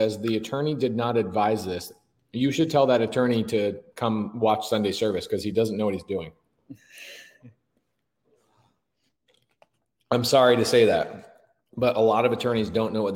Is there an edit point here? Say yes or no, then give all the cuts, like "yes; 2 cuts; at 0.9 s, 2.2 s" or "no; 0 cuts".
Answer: no; 0 cuts